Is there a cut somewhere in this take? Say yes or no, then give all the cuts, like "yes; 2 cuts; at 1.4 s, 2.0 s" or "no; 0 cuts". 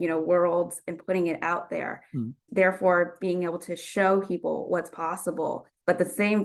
no; 0 cuts